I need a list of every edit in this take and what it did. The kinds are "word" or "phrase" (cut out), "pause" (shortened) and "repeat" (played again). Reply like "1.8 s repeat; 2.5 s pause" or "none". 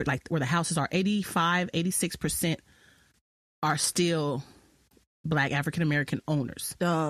none